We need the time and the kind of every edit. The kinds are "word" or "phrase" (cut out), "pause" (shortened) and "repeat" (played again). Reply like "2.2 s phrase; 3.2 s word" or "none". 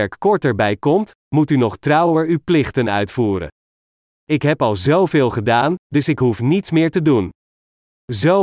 none